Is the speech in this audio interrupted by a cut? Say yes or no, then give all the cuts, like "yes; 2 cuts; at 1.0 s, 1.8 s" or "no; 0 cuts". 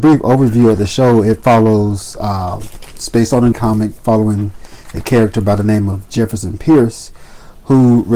yes; 2 cuts; at 3.5 s, 4.0 s